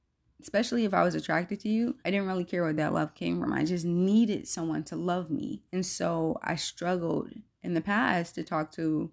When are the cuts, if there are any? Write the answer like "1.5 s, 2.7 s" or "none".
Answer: 2.0 s, 5.7 s

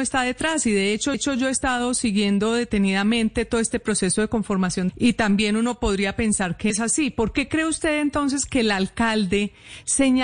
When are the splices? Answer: 1.1 s, 4.9 s, 6.7 s

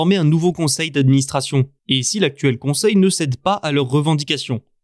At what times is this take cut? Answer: 1.8 s

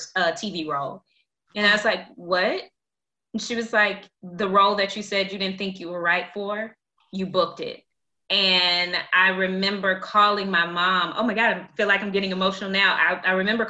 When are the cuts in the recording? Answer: 4.1 s

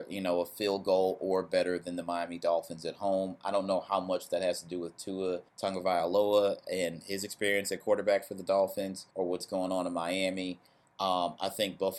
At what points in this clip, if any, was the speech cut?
5.5 s, 9.1 s

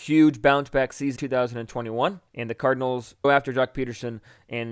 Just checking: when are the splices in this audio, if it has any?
1.2 s, 2.3 s, 3.2 s

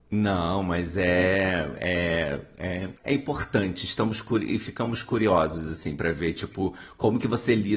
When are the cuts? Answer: 3.0 s

